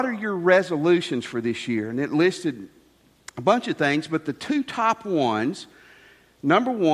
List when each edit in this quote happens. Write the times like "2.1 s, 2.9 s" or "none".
none